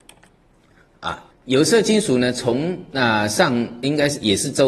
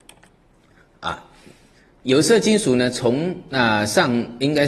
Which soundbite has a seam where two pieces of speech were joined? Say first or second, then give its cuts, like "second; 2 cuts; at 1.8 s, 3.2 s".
first; 1 cut; at 1.3 s